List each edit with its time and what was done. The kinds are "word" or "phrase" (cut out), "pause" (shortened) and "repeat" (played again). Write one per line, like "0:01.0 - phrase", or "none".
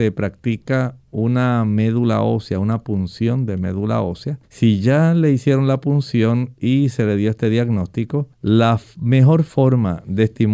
0:04.4 - pause
0:08.3 - pause